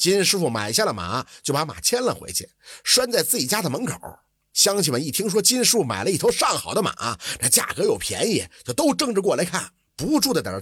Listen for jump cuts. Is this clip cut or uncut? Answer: uncut